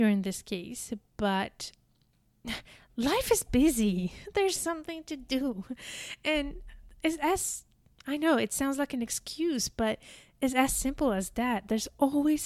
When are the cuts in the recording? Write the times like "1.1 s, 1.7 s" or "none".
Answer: 4.6 s